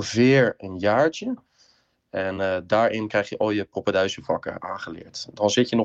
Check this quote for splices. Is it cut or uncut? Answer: uncut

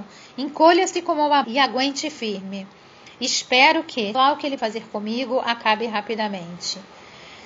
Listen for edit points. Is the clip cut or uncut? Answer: cut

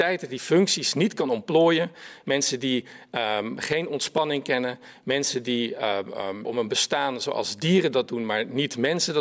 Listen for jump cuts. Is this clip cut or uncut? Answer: cut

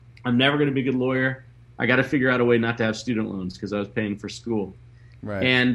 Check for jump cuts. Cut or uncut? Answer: uncut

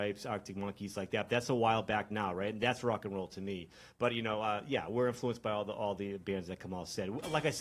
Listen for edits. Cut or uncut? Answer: uncut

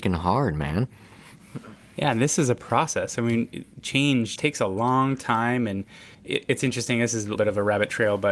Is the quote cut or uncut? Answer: cut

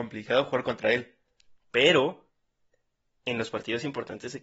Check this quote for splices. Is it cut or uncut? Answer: uncut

